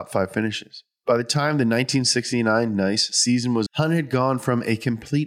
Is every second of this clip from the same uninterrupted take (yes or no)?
no